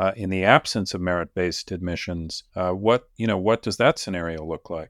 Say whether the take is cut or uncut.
cut